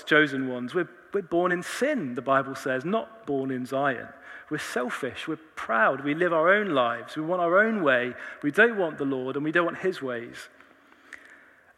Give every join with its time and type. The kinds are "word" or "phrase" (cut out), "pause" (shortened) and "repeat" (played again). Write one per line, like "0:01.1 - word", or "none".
none